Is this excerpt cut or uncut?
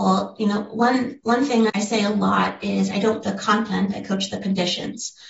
cut